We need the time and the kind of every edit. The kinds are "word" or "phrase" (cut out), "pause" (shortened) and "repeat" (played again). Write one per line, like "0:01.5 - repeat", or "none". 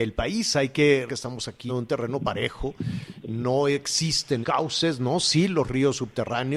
0:01.1 - word
0:01.7 - word
0:04.4 - word